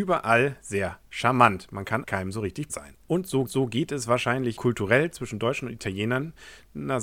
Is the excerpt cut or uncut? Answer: cut